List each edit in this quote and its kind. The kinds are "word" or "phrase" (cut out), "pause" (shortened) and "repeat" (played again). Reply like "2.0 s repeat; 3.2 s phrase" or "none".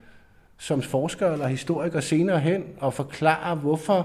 none